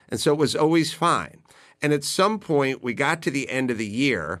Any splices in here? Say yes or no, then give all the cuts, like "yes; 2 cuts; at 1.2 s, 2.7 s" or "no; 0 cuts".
no; 0 cuts